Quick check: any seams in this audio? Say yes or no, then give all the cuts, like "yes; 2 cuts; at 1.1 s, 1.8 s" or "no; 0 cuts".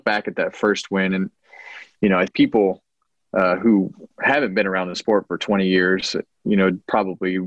yes; 2 cuts; at 2.3 s, 4.1 s